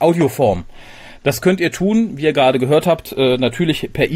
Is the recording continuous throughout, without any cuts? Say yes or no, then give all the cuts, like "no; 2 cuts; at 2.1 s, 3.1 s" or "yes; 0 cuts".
yes; 0 cuts